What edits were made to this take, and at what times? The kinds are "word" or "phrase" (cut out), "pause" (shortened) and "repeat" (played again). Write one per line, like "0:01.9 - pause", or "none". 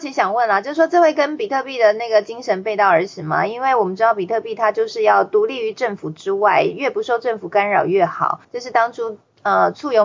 0:08.4 - pause